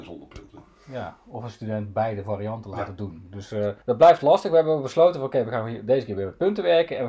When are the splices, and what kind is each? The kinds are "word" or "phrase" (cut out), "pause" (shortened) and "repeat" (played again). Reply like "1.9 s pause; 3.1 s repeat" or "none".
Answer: 3.8 s pause